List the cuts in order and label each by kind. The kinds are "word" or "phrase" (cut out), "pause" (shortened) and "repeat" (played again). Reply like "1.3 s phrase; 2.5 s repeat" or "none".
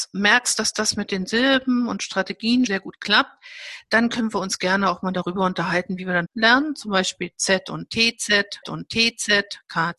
2.7 s word; 6.3 s phrase; 8.6 s repeat